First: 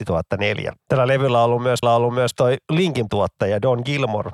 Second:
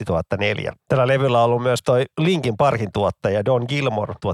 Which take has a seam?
first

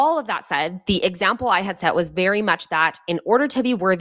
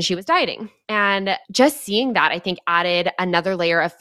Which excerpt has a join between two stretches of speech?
second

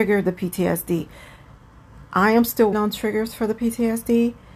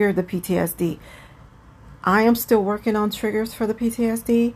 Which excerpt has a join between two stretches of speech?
first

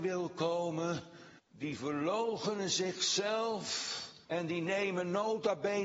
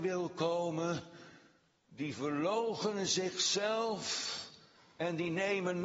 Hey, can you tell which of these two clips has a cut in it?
first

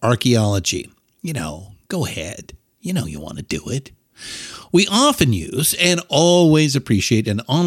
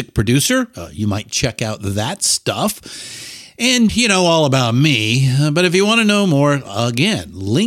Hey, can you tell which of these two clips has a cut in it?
second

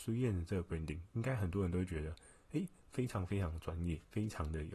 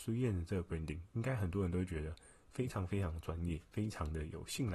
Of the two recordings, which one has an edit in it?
second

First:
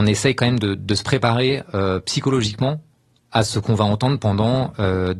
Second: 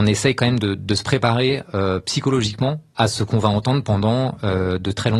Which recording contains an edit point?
second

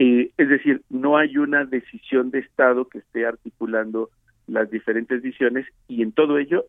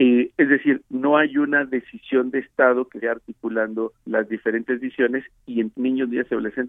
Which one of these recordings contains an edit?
second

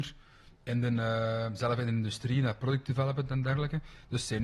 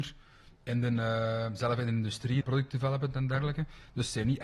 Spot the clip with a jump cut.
second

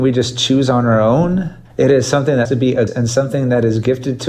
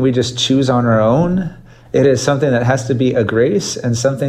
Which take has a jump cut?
first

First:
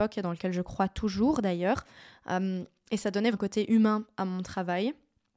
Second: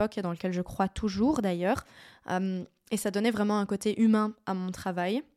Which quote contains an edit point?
first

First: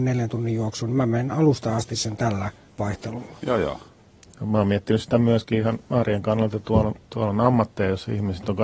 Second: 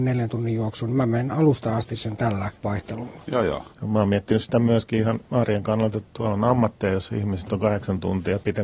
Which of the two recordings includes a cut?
second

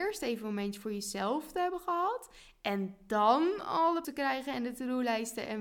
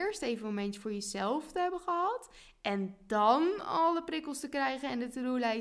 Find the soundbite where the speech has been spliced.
first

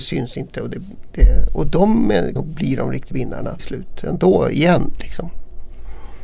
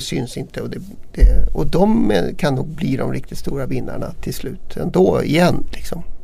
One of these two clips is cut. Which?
first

